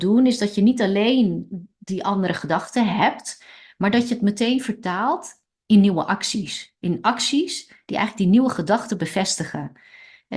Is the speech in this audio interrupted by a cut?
no; 0 cuts

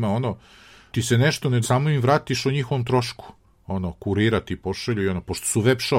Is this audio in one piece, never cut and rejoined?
no; 2 cuts; at 0.9 s, 1.6 s

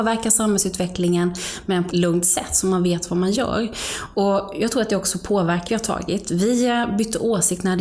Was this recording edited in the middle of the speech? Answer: yes; 2 cuts; at 1.9 s, 5.7 s

